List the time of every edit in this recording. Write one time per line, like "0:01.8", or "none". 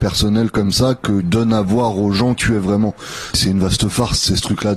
0:01.2
0:02.4